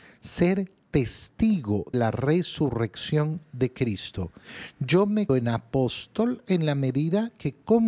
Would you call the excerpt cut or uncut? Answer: cut